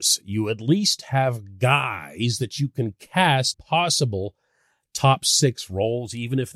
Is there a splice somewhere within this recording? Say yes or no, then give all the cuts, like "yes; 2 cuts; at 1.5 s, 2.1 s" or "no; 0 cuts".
yes; 1 cut; at 3.5 s